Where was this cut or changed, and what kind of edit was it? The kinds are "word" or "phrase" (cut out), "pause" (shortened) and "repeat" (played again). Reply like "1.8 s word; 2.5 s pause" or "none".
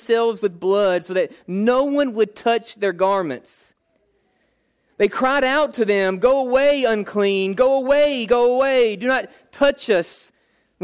none